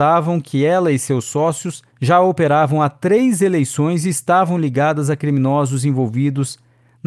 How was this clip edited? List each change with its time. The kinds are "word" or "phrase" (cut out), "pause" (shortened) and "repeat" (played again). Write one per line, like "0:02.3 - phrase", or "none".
0:01.9 - pause